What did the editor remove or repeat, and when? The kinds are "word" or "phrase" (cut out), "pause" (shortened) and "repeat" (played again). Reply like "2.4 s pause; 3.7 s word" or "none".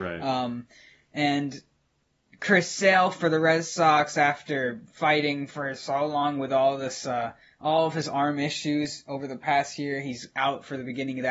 none